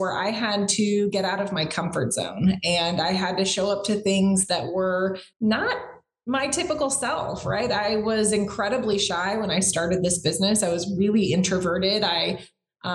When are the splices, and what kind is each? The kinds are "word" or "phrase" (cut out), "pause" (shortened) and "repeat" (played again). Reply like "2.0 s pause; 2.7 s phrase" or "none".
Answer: 5.3 s pause